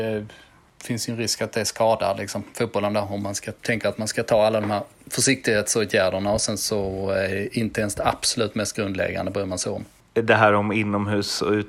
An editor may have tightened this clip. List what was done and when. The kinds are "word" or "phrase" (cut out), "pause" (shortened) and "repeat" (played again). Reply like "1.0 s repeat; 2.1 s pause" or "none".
3.6 s pause